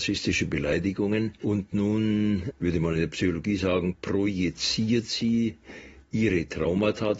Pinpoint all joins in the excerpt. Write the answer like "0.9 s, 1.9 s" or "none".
none

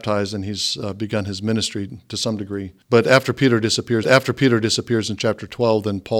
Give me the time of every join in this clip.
2.8 s, 4.0 s

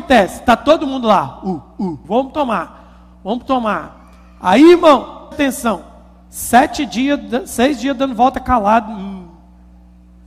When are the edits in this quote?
2.0 s, 5.3 s

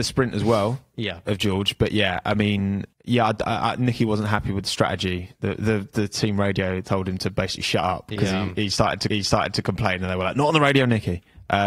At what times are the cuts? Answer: 2.9 s, 9.1 s

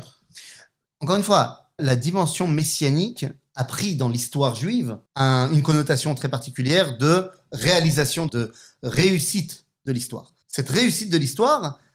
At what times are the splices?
1.8 s, 5.1 s, 8.3 s, 10.4 s

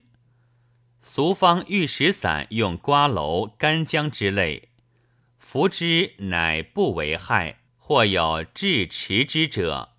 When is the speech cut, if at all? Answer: 7.7 s

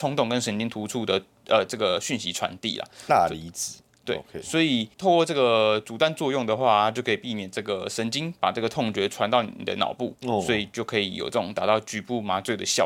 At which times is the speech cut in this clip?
4.9 s, 10.2 s

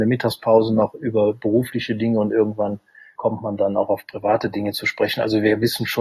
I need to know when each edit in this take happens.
3.2 s

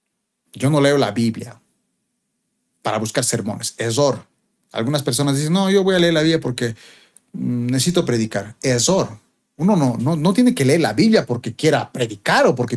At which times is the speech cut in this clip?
none

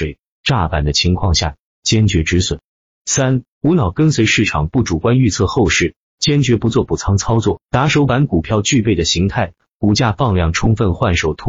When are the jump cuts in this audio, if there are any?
none

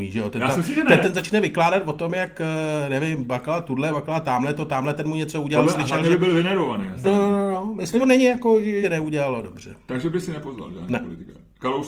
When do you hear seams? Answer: 1.0 s, 7.0 s, 8.0 s, 8.8 s

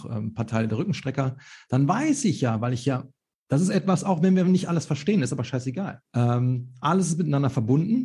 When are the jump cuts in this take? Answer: 6.1 s

